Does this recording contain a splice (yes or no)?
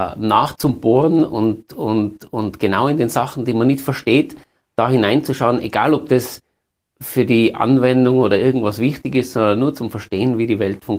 no